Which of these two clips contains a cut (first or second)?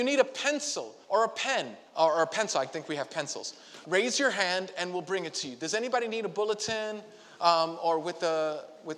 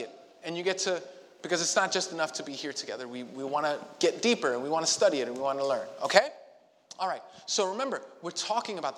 first